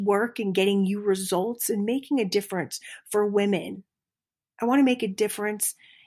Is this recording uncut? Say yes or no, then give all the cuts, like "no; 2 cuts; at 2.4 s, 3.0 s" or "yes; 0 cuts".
yes; 0 cuts